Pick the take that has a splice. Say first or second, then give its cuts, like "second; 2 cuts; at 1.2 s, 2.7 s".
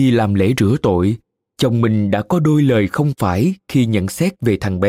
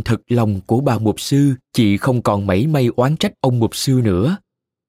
second; 1 cut; at 1.6 s